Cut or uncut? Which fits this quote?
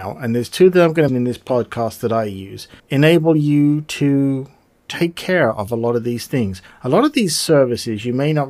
cut